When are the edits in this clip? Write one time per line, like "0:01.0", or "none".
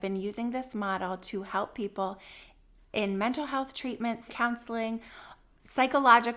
0:04.3